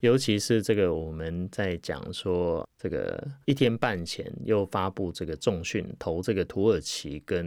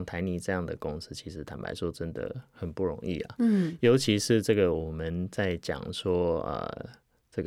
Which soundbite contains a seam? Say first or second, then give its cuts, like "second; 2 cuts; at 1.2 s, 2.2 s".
first; 2 cuts; at 2.6 s, 3.4 s